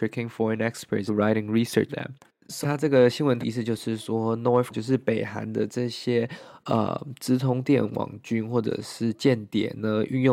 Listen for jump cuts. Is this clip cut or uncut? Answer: cut